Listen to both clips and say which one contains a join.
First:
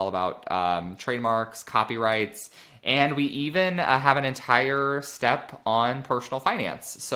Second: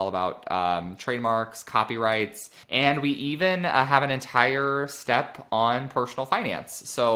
second; 1 cut; at 2.6 s

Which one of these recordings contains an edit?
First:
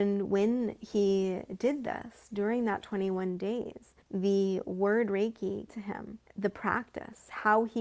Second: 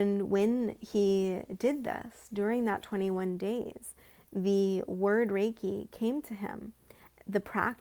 first; 3 cuts; at 4.0 s, 5.7 s, 6.2 s

